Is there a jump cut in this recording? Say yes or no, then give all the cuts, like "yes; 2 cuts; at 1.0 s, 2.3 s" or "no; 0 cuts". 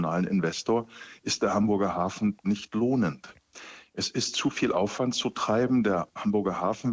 no; 0 cuts